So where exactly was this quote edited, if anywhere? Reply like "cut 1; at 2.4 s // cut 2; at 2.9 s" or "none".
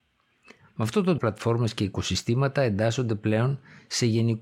cut 1; at 1.2 s